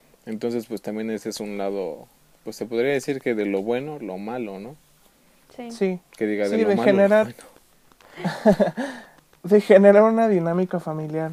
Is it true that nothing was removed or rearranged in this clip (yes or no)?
yes